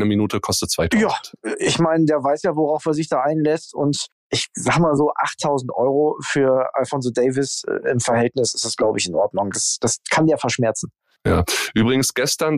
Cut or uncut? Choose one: uncut